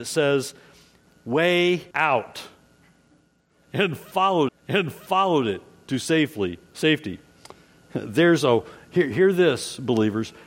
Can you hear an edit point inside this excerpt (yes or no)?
yes